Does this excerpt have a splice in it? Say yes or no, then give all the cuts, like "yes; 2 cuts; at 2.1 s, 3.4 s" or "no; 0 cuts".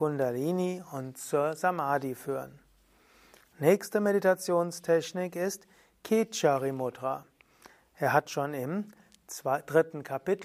no; 0 cuts